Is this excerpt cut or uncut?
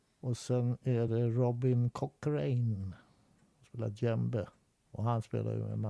uncut